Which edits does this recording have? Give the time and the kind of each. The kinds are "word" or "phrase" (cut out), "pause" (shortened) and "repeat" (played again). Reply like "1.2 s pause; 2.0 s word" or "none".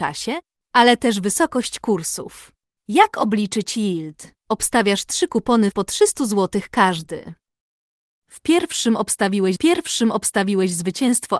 2.8 s pause; 4.4 s pause; 5.7 s phrase; 9.6 s repeat